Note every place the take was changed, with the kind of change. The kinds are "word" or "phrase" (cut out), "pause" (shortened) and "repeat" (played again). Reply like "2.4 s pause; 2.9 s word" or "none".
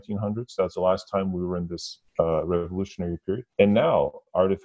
2.1 s pause; 3.5 s pause